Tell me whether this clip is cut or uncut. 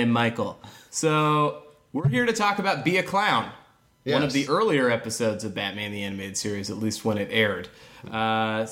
uncut